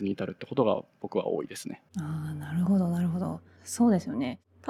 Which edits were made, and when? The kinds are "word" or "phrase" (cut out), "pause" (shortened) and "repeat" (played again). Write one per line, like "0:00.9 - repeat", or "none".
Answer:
0:01.9 - pause

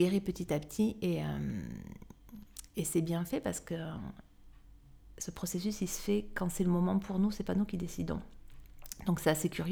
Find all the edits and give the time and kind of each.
none

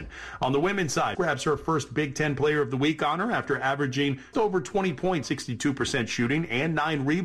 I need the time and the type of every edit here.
0:01.1 - phrase
0:04.3 - word
0:05.2 - word

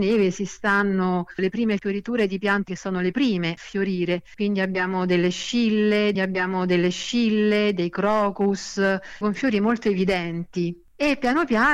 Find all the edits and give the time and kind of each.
0:01.4 - word
0:01.8 - word
0:02.7 - phrase
0:03.6 - word
0:06.1 - repeat
0:09.2 - word

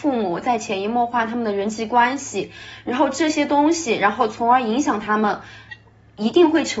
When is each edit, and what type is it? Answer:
none

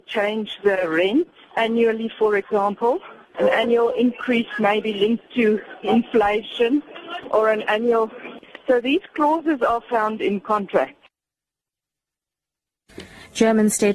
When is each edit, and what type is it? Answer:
none

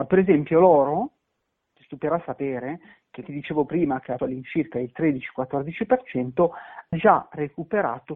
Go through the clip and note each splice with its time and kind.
0:03.2 - word
0:04.2 - word
0:06.9 - word

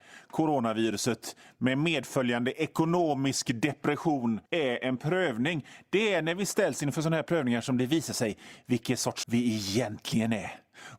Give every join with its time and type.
0:04.5 - pause
0:09.2 - word

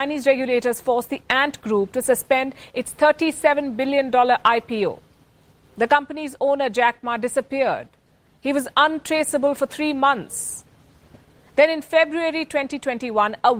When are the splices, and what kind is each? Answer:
none

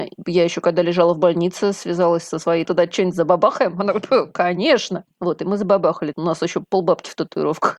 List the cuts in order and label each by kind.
0:02.6 - phrase
0:06.1 - phrase

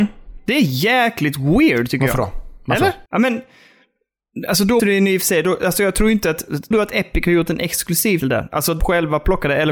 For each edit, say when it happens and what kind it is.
0:03.1 - pause
0:04.8 - word
0:06.7 - word
0:08.2 - word
0:08.8 - word

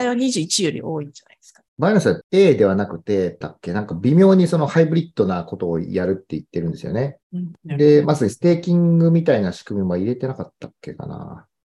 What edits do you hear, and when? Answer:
0:01.7 - pause
0:02.2 - word
0:03.4 - word
0:07.2 - pause
0:07.6 - pause

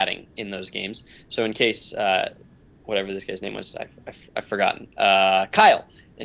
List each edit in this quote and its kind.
none

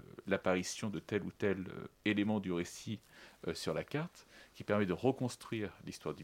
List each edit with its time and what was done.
none

